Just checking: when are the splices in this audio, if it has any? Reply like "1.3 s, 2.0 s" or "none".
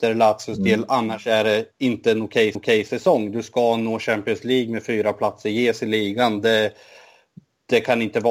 2.5 s